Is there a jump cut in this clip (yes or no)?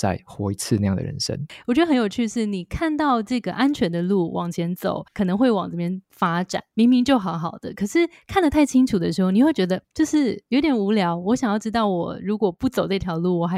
yes